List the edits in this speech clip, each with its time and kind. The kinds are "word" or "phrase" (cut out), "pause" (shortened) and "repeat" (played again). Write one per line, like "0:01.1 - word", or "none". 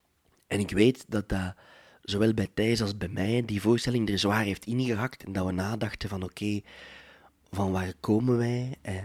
none